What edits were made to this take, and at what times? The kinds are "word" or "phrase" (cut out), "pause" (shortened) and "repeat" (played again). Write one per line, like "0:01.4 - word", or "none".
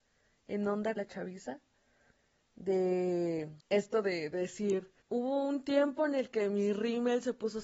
0:01.0 - word
0:03.6 - pause
0:05.0 - pause